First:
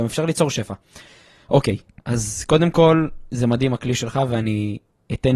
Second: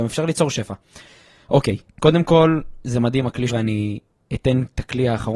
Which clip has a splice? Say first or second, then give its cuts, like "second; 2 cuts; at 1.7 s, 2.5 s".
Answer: second; 2 cuts; at 2.0 s, 3.5 s